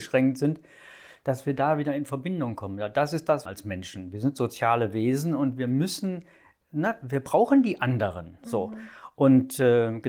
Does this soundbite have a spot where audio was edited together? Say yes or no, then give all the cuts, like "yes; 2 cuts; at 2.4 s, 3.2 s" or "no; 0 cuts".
yes; 1 cut; at 3.5 s